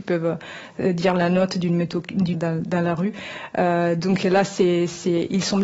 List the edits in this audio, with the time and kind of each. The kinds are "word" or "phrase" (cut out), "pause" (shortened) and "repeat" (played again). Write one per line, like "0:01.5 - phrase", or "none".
0:02.3 - phrase